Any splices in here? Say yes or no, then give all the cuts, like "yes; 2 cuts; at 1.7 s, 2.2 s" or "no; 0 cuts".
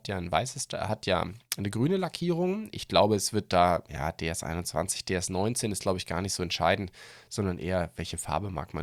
no; 0 cuts